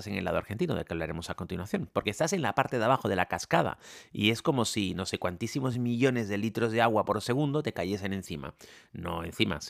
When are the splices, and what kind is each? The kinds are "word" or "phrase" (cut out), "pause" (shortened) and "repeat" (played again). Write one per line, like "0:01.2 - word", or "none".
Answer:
none